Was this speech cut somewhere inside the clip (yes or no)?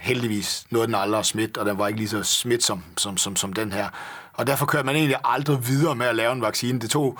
no